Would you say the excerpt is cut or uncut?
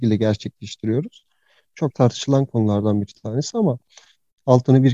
uncut